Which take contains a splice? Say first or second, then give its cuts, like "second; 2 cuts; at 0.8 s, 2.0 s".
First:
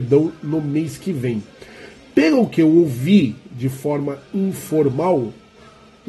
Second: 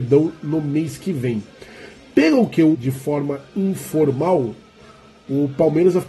second; 1 cut; at 2.7 s